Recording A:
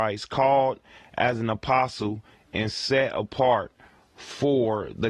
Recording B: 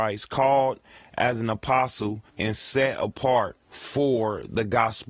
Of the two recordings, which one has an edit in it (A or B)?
B